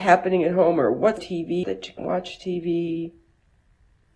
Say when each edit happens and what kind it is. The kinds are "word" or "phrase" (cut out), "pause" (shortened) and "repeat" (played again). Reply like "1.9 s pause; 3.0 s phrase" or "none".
1.2 s word; 1.6 s word; 2.0 s word